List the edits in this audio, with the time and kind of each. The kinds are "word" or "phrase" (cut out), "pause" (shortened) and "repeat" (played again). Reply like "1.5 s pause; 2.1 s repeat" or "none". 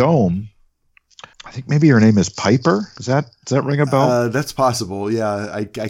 1.3 s word